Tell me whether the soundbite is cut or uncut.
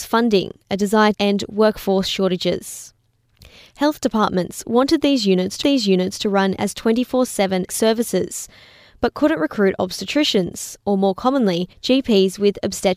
cut